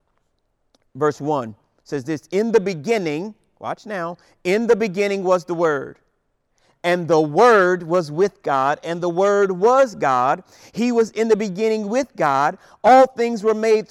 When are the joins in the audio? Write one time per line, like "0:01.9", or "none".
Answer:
none